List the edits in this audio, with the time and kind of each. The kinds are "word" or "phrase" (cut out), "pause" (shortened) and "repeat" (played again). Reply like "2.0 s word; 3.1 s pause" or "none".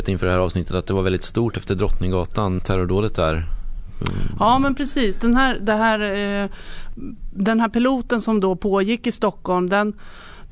2.6 s word